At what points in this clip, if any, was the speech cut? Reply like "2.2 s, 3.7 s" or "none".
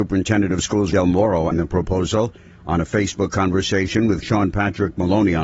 0.9 s, 1.5 s, 4.2 s

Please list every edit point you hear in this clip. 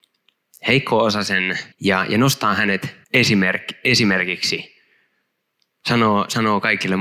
1.7 s, 3.0 s

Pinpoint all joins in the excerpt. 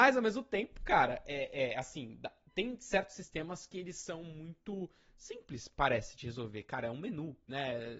none

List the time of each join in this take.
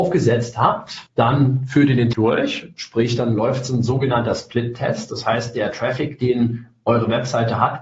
1.1 s, 2.1 s

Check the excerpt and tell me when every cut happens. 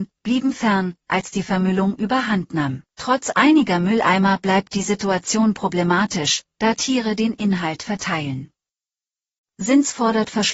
2.9 s

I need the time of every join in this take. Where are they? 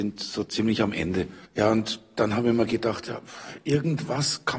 1.4 s

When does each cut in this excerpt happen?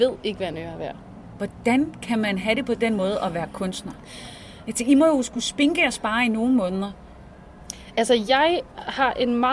none

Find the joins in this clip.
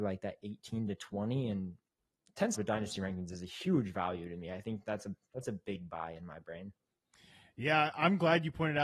2.5 s

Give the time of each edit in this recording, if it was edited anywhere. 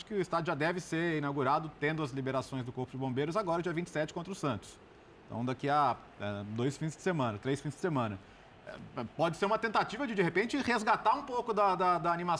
none

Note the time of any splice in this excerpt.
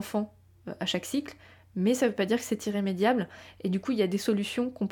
none

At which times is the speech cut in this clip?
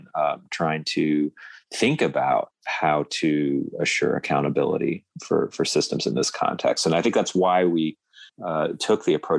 8.3 s

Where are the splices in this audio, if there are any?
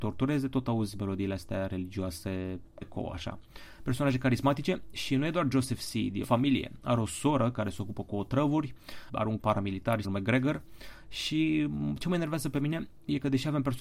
2.8 s, 6.2 s, 9.1 s, 9.4 s, 10.0 s

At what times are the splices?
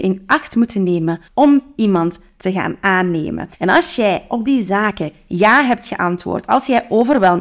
1.3 s, 3.5 s

